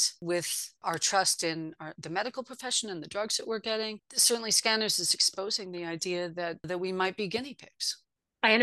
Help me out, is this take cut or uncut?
uncut